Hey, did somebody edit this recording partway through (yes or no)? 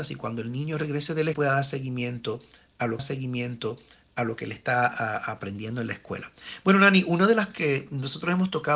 yes